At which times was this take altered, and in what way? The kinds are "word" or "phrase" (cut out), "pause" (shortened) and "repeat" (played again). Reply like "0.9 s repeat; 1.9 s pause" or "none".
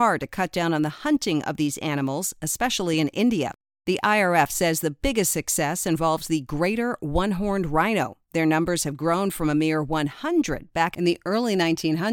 none